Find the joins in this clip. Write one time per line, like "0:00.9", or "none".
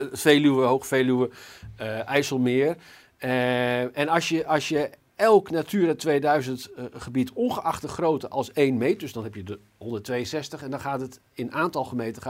none